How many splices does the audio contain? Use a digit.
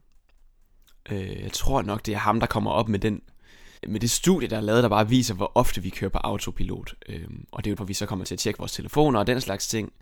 2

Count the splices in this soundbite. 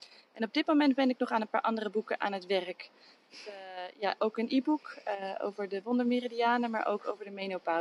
0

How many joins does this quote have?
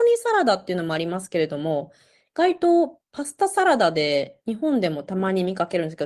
0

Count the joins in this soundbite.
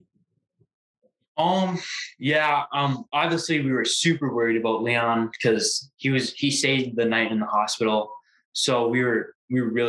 0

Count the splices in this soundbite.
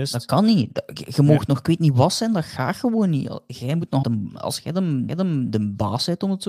2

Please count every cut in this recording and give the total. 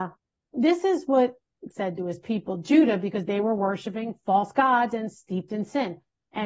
1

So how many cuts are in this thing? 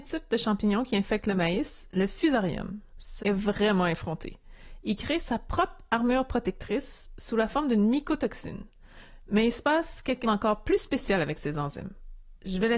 2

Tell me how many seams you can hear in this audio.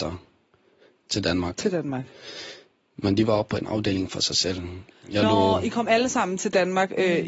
0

